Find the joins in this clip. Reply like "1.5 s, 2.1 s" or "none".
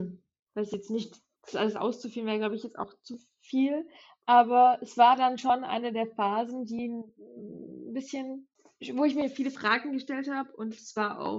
none

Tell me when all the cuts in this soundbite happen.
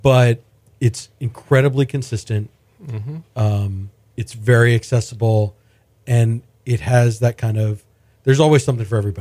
none

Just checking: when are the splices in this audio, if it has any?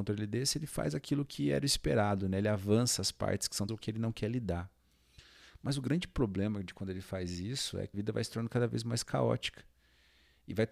3.7 s, 7.9 s

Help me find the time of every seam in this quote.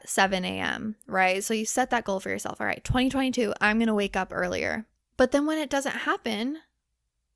5.0 s

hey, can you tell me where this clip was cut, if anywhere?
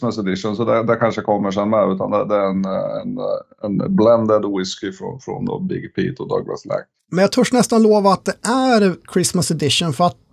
7.0 s

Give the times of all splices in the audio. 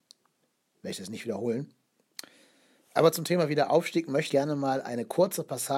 4.3 s

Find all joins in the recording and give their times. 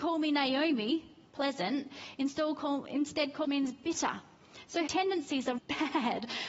3.4 s, 4.9 s, 5.6 s

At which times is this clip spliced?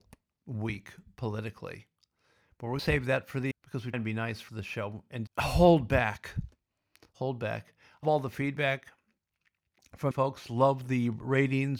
2.8 s, 3.5 s, 3.9 s, 4.5 s, 5.3 s, 8.0 s, 10.1 s

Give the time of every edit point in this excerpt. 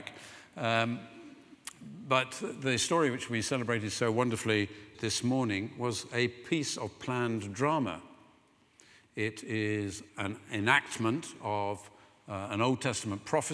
4.9 s, 10.1 s

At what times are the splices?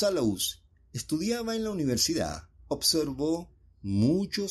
none

